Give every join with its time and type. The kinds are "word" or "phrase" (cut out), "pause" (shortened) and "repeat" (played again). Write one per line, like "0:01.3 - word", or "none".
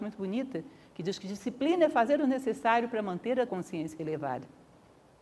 0:03.5 - word

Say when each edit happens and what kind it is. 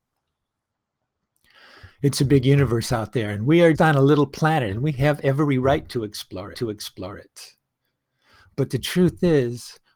0:03.7 - word
0:06.5 - repeat

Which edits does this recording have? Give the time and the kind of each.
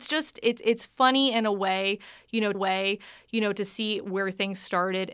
0:02.5 - repeat

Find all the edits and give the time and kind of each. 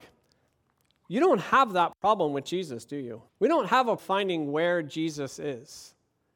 0:03.3 - pause
0:04.0 - word

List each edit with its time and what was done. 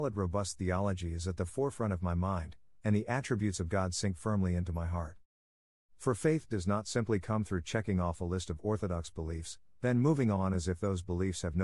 none

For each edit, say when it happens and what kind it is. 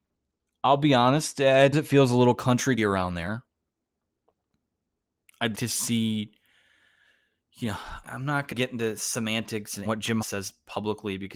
0:01.7 - word
0:02.8 - word
0:05.5 - word
0:08.0 - word
0:08.5 - word
0:09.9 - word
0:10.2 - word

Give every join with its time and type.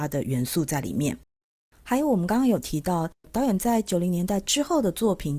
none

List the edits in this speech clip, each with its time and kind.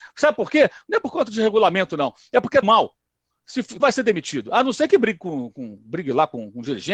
0:02.6 - word
0:03.8 - phrase

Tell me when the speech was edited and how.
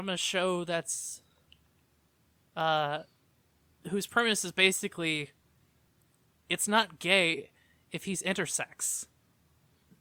none

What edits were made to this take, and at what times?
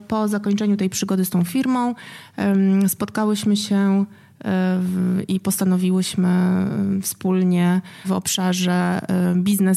0:08.0 - word

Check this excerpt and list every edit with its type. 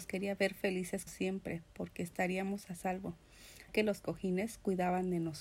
0:01.1 - word
0:03.7 - word

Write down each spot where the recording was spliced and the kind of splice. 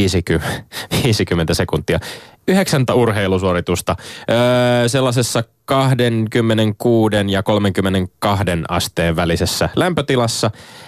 0:02.9 - phrase

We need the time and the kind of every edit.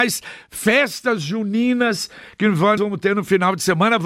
0:02.8 - word

